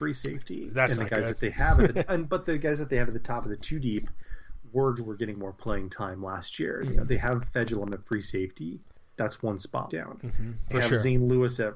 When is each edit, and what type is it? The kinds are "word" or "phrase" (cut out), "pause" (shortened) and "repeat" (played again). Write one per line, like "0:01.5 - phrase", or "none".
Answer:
0:02.1 - word
0:05.0 - word
0:09.9 - word